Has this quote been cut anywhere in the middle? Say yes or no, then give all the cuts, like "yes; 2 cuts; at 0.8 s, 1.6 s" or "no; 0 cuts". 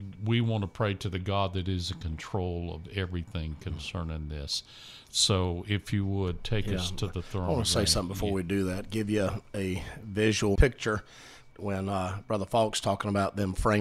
yes; 2 cuts; at 10.6 s, 11.5 s